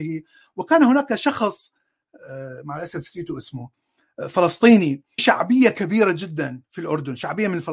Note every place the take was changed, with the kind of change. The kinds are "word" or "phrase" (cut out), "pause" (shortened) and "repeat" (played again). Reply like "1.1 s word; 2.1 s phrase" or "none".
5.2 s word